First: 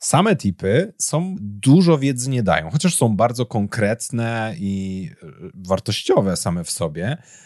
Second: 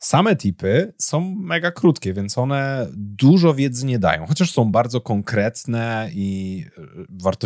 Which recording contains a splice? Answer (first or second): first